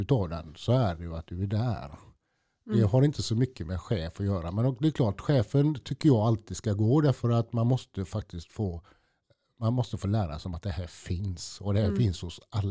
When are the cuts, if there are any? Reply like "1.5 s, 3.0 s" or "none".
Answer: none